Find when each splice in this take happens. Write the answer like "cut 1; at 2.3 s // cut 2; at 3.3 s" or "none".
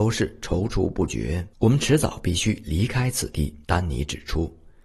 cut 1; at 1.5 s // cut 2; at 3.6 s